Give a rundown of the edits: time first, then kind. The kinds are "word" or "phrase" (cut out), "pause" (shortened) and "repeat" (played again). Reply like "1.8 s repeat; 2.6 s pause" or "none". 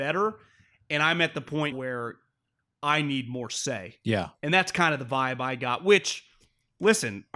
1.7 s word

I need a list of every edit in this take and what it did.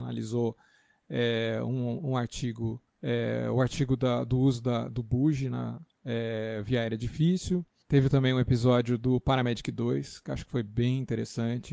2.9 s pause

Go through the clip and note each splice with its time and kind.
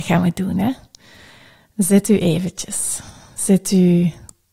none

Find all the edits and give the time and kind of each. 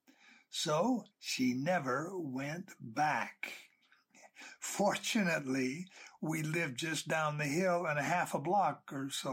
1.1 s pause

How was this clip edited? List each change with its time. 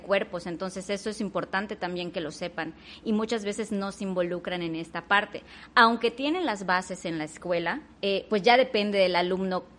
7.9 s pause

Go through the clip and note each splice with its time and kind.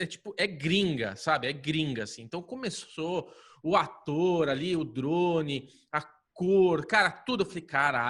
none

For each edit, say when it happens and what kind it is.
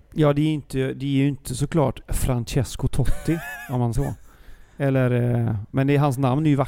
4.0 s word

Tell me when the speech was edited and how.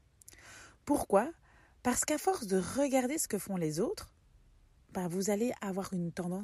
none

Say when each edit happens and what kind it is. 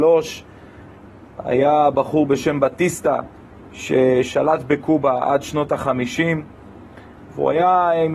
none

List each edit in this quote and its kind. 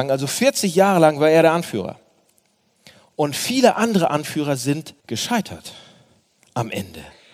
5.0 s pause

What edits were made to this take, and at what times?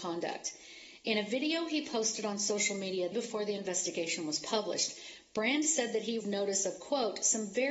3.1 s word; 6.2 s word

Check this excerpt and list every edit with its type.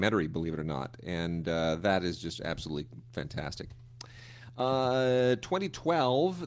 none

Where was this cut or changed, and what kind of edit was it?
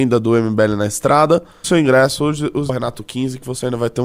1.6 s word; 2.7 s word

